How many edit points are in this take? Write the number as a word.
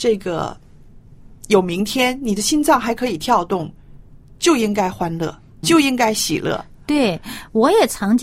one